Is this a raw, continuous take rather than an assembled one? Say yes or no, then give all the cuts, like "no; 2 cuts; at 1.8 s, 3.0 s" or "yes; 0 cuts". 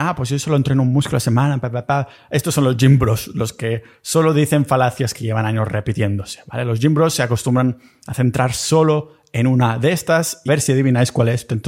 no; 1 cut; at 10.5 s